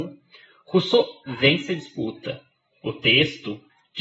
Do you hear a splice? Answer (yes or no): no